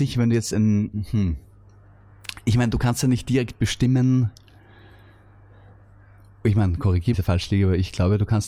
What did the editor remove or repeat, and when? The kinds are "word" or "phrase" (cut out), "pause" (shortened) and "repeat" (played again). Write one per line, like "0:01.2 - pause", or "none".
0:07.1 - phrase